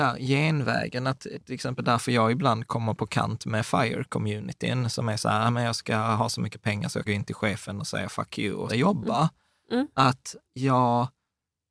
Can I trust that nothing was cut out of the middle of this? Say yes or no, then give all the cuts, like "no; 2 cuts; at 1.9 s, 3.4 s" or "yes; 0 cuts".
no; 3 cuts; at 7.1 s, 8.7 s, 10.5 s